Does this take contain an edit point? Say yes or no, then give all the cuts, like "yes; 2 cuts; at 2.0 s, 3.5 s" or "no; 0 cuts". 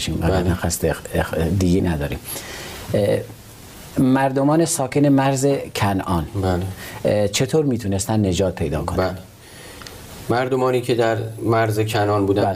yes; 1 cut; at 1.8 s